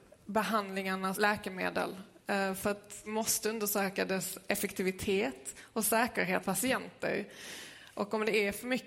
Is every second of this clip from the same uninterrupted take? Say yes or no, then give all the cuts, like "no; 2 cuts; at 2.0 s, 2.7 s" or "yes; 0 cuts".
no; 3 cuts; at 1.1 s, 3.1 s, 6.4 s